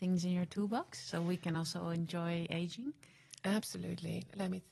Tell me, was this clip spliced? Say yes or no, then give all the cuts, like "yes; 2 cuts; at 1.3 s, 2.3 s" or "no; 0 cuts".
no; 0 cuts